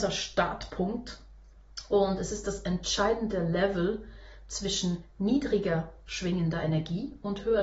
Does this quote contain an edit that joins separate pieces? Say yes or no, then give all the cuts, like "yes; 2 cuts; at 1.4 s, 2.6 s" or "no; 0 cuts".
no; 0 cuts